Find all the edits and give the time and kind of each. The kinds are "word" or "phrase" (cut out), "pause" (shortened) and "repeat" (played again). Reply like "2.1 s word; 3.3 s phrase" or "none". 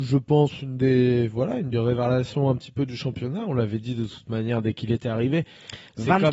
none